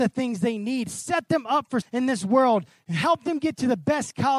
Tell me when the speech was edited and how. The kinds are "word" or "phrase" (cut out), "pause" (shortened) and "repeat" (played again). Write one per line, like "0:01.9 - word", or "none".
0:01.8 - word